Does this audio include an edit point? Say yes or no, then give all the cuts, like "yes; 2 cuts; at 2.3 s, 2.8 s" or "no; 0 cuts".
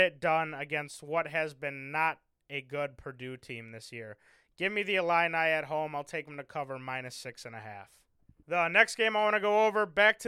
no; 0 cuts